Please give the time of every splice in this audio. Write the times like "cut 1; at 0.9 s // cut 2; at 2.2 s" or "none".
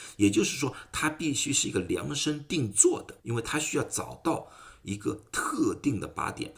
cut 1; at 3.2 s